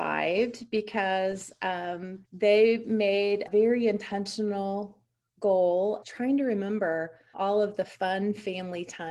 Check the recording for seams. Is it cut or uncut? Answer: cut